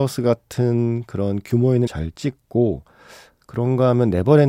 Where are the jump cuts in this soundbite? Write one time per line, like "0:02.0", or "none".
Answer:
0:01.9